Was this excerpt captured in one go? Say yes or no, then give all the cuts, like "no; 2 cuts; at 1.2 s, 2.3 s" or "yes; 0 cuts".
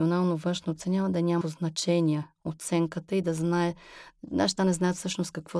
no; 2 cuts; at 1.4 s, 4.6 s